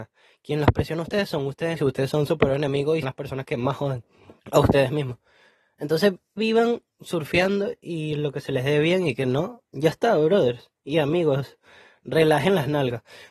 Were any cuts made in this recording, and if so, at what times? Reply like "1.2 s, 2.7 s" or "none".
1.8 s, 3.0 s, 4.4 s, 6.4 s, 9.6 s

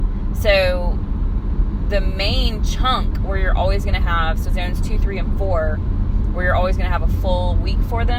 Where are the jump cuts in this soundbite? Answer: 4.5 s

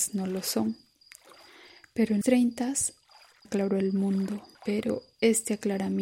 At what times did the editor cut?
2.2 s, 3.4 s, 4.5 s

